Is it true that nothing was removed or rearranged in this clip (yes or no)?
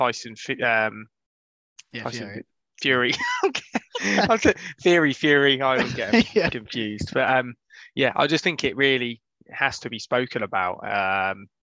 yes